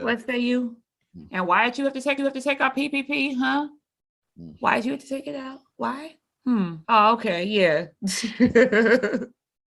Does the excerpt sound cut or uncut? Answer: cut